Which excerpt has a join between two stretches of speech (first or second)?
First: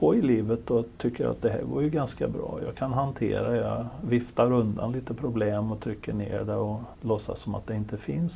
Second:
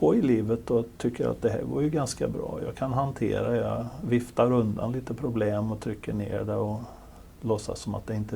first